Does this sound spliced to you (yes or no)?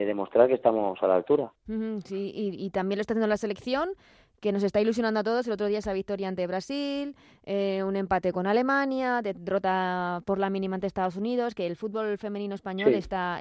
no